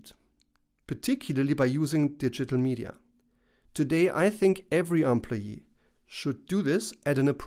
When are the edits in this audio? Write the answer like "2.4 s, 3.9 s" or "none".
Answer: none